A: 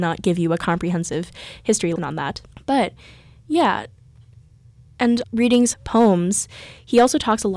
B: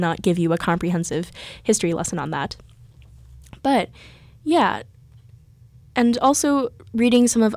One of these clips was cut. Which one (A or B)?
A